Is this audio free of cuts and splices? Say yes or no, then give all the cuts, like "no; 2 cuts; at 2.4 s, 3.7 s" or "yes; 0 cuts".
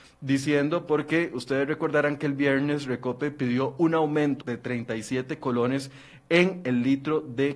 no; 1 cut; at 4.4 s